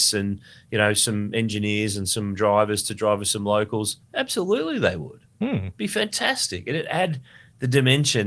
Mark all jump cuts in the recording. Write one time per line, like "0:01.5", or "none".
0:04.0